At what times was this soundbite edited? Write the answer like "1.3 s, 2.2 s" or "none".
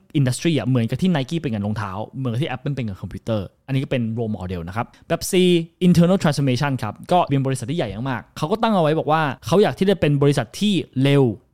7.3 s